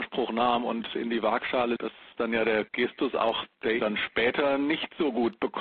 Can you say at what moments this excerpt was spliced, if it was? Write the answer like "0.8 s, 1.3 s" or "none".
1.8 s, 2.7 s, 3.8 s